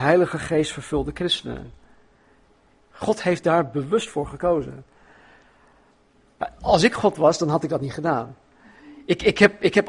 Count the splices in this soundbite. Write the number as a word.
zero